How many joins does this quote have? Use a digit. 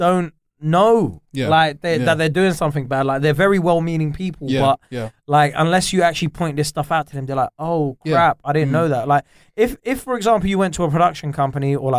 0